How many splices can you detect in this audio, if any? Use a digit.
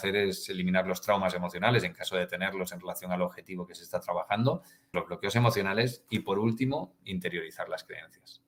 1